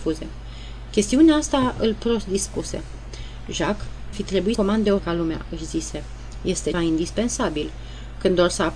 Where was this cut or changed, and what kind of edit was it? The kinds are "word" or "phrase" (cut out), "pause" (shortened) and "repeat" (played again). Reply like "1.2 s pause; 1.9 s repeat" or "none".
4.1 s word; 4.5 s word; 5.0 s word; 6.7 s word